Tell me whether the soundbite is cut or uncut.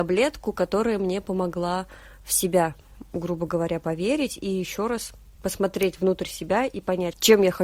uncut